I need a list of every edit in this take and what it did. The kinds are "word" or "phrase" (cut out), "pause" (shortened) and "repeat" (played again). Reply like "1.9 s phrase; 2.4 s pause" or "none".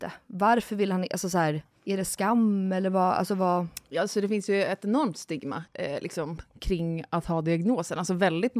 5.7 s pause